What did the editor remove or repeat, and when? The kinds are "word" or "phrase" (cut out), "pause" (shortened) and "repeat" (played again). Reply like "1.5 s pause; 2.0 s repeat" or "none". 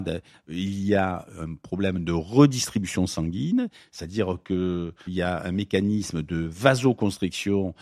5.1 s word